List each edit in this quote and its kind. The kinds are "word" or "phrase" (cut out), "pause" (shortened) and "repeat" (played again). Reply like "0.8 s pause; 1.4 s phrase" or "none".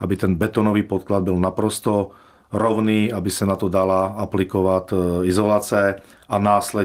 none